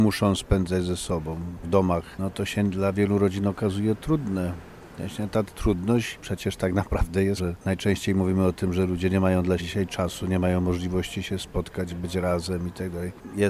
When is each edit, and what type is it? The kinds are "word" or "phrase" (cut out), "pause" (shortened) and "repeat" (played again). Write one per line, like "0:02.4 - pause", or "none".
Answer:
0:01.6 - word
0:07.4 - word
0:09.6 - word

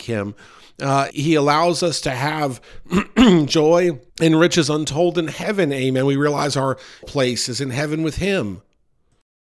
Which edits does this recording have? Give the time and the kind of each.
0:01.1 - word
0:04.1 - pause
0:07.0 - word

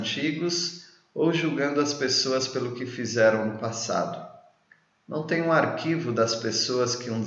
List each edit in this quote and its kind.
none

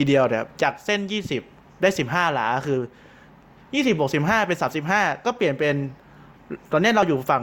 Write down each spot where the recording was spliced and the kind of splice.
none

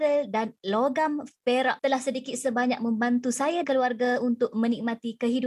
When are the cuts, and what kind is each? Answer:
0:01.8 - word
0:03.6 - word

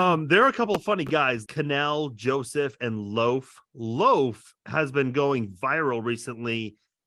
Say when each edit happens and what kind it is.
0:01.5 - word

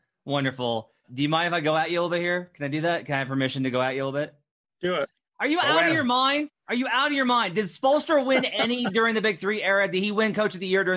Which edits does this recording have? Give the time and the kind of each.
none

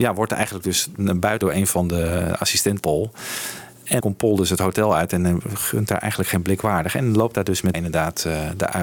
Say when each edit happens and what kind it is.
0:01.4 - word
0:02.8 - word
0:04.0 - word
0:07.7 - word

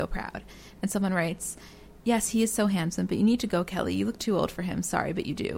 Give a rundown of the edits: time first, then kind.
none

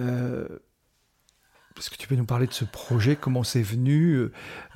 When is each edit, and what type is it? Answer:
none

